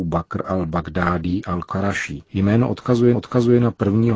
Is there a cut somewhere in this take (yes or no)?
yes